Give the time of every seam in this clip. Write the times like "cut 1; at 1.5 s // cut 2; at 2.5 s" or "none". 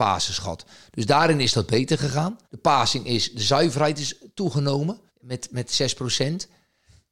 cut 1; at 2.4 s // cut 2; at 5.1 s